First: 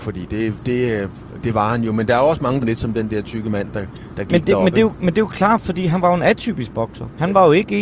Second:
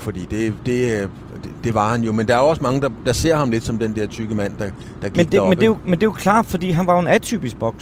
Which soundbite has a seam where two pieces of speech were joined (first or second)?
first